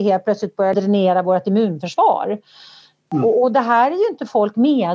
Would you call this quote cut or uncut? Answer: uncut